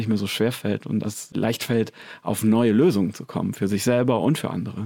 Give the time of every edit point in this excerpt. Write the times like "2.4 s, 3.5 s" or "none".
1.0 s